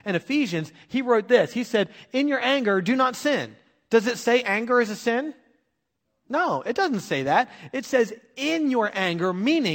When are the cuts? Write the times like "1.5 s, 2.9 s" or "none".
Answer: none